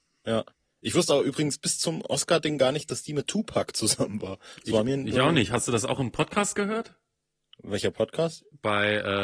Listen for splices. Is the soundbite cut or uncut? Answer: uncut